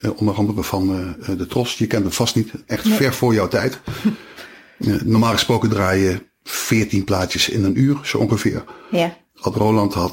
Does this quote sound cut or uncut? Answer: uncut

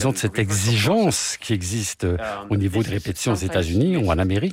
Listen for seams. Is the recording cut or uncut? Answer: uncut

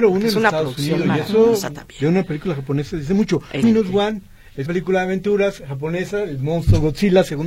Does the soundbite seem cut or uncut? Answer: cut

